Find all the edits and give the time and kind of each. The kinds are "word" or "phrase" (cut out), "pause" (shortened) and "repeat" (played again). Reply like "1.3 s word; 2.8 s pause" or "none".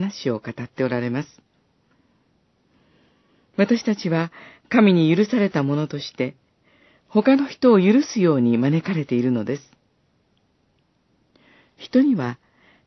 none